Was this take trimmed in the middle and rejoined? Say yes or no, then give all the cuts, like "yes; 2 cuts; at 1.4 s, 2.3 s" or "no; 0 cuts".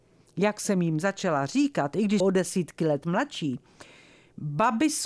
yes; 1 cut; at 2.2 s